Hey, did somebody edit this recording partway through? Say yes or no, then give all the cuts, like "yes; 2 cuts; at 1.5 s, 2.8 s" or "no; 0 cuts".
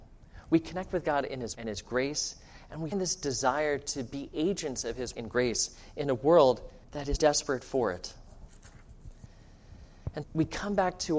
yes; 6 cuts; at 1.5 s, 2.9 s, 5.1 s, 6.8 s, 7.2 s, 10.2 s